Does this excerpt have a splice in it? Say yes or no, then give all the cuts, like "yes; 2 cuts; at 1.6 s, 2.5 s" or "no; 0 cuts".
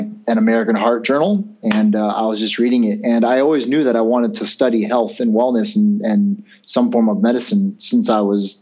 no; 0 cuts